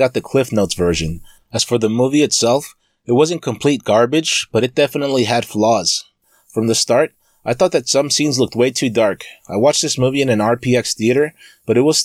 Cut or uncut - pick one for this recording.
uncut